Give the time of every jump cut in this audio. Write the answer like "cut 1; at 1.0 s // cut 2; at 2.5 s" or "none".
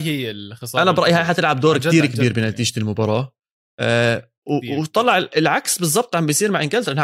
none